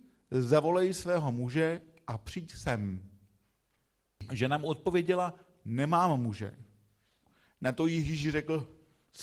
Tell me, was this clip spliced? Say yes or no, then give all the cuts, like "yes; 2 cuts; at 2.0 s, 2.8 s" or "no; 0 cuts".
no; 0 cuts